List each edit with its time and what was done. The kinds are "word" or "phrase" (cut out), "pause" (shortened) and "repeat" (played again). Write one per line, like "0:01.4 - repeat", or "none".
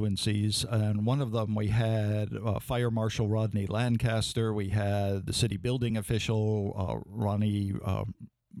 none